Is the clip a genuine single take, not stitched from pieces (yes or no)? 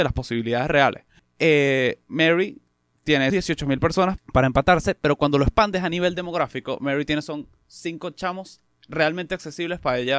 no